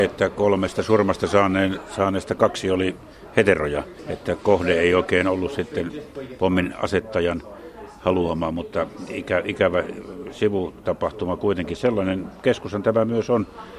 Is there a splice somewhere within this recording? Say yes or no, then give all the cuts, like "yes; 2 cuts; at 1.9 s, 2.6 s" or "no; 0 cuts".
no; 0 cuts